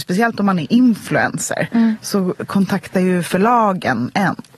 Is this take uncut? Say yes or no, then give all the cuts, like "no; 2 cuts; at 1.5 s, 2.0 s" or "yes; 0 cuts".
yes; 0 cuts